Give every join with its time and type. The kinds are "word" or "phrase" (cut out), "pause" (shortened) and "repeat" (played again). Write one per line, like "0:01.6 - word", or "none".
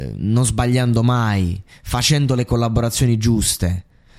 none